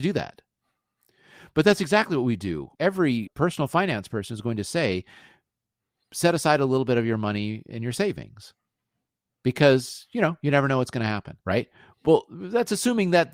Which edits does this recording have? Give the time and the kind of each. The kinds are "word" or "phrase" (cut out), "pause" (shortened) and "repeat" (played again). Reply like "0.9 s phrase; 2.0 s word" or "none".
2.7 s pause; 11.4 s pause